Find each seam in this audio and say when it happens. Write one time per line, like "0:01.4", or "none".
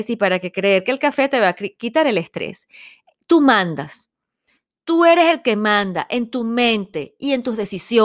none